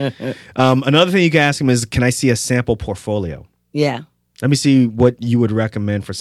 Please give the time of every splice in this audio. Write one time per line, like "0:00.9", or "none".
none